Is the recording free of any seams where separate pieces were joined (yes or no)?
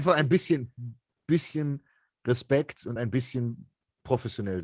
yes